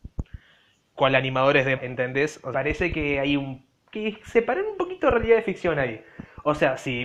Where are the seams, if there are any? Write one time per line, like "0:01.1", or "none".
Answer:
0:01.8
0:02.5